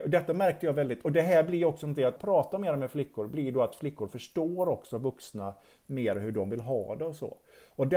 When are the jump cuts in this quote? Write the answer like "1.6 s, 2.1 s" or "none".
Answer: 2.2 s

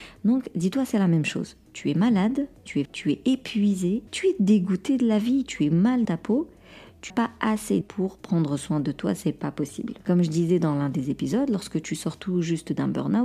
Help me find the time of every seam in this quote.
2.9 s, 4.1 s, 6.0 s, 7.1 s, 7.8 s

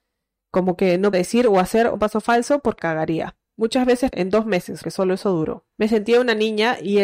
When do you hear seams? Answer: 1.1 s, 2.0 s, 2.8 s, 4.1 s, 4.8 s, 5.7 s

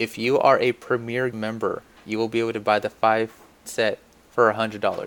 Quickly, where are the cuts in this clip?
1.3 s, 3.6 s

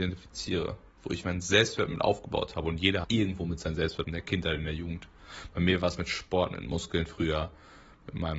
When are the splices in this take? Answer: 1.2 s, 3.0 s, 4.0 s

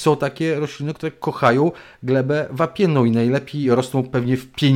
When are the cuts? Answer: none

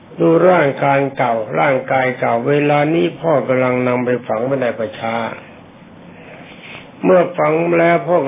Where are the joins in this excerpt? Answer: 6.9 s

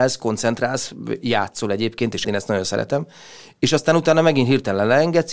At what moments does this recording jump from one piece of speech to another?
2.2 s

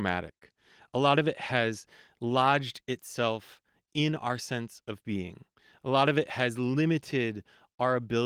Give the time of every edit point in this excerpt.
none

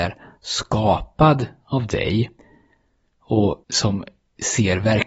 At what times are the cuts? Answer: 3.6 s

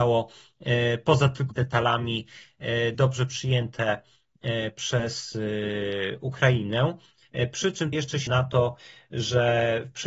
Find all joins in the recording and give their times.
1.5 s, 2.9 s, 7.9 s, 8.3 s

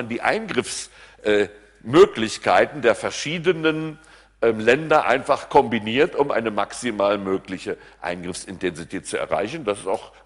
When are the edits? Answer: none

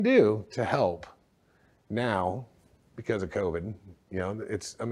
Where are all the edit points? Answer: none

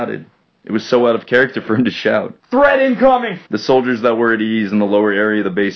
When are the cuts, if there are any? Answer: 2.4 s, 3.5 s

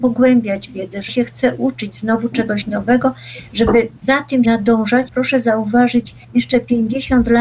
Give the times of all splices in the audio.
1.1 s, 4.0 s, 4.4 s, 5.1 s, 6.2 s

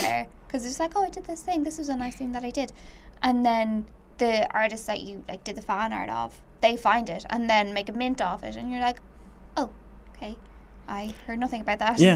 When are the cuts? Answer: 4.1 s

